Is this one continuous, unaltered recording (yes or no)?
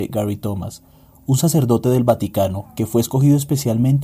yes